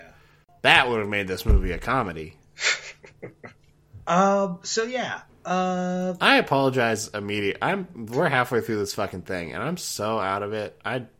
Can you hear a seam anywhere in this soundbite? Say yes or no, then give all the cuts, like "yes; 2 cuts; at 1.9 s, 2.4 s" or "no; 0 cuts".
no; 0 cuts